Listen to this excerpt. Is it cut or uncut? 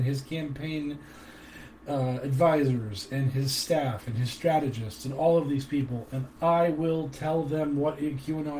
uncut